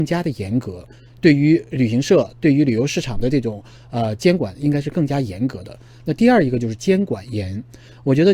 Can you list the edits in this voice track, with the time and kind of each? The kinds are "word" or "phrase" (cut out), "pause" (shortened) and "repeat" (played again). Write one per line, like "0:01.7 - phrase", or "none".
none